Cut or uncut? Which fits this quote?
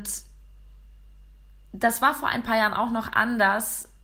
uncut